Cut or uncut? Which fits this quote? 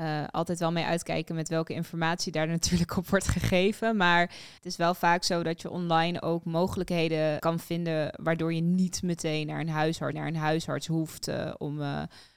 cut